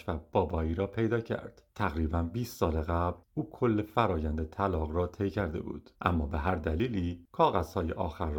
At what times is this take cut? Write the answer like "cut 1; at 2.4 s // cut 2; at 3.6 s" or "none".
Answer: cut 1; at 1.7 s // cut 2; at 5.9 s